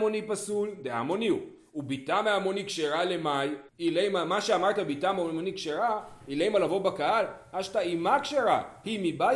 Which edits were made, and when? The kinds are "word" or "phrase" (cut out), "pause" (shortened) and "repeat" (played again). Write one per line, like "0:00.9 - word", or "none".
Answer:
0:03.7 - pause